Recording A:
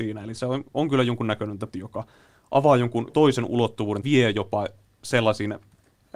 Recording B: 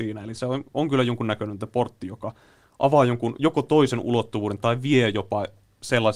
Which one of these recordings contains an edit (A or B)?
A